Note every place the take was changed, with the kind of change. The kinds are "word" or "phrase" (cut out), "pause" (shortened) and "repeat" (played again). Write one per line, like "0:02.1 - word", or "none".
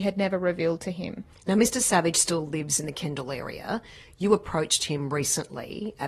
none